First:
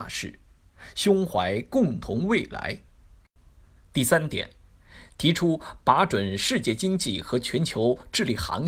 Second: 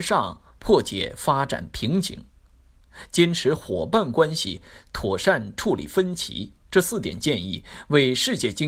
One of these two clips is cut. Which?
second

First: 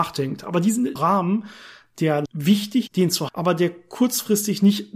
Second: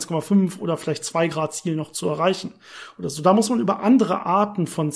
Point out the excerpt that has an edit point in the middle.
first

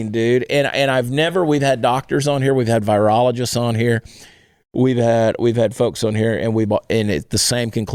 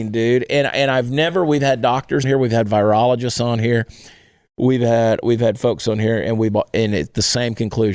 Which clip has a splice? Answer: second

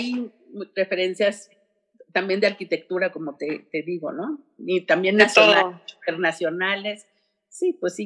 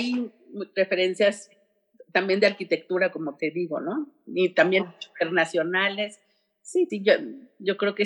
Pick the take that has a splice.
second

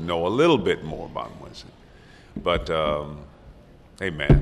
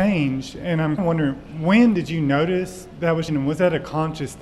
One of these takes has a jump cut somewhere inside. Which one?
second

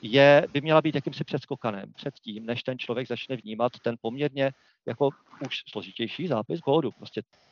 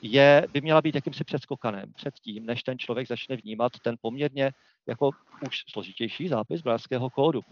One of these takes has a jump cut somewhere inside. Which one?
first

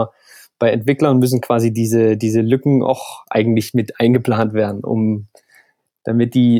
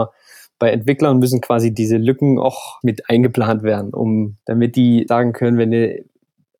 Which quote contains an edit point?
second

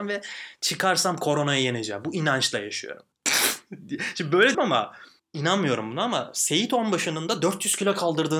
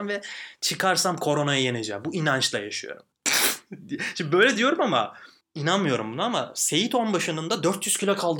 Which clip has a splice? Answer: first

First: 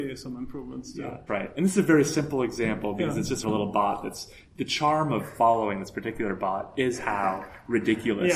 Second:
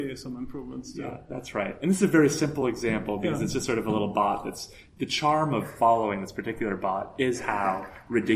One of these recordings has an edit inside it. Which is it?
first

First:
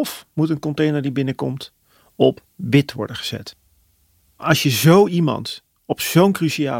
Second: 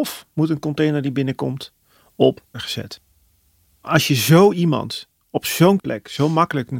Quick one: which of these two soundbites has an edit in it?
second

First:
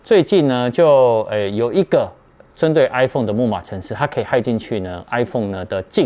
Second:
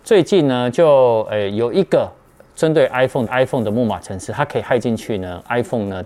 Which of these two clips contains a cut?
second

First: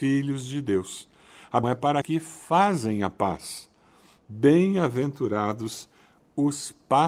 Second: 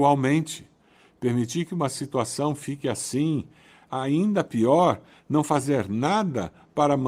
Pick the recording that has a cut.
first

